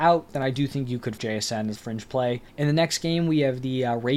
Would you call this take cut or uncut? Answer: cut